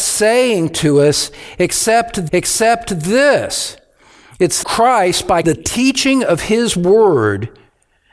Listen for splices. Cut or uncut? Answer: cut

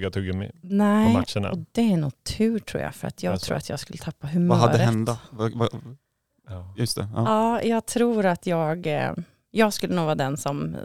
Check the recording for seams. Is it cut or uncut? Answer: uncut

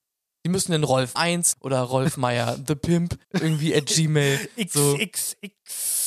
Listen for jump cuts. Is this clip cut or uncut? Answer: cut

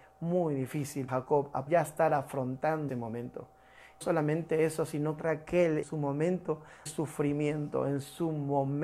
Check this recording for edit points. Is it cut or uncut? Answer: cut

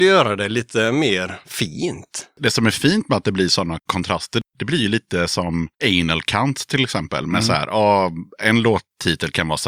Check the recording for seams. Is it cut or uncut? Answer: uncut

